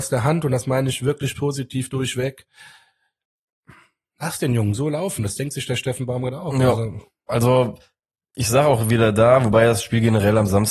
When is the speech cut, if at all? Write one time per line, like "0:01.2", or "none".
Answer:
none